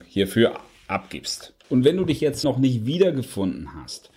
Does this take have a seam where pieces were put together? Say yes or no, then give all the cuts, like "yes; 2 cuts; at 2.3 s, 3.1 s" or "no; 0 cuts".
yes; 2 cuts; at 1.6 s, 2.4 s